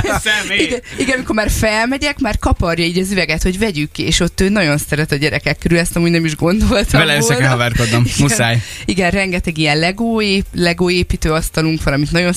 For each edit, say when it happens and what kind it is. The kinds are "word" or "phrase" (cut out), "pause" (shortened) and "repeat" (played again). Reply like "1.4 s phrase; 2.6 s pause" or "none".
none